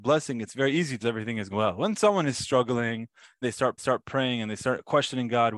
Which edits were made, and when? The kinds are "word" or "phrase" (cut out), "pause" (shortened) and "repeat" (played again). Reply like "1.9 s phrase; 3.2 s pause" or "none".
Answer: 1.0 s phrase; 1.5 s word; 3.4 s word; 3.8 s repeat